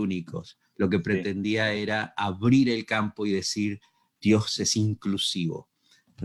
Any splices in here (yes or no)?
no